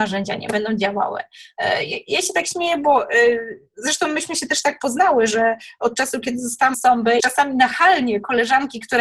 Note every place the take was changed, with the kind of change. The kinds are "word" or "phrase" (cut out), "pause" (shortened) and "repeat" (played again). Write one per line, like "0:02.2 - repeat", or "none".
0:06.7 - word
0:07.2 - phrase